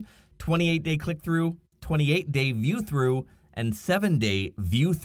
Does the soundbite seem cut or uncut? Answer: uncut